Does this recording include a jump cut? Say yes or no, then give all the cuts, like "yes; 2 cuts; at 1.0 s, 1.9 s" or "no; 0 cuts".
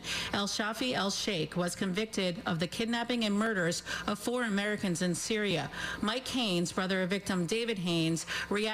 no; 0 cuts